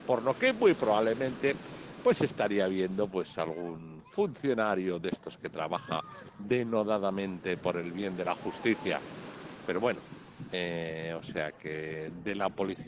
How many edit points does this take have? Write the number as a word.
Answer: zero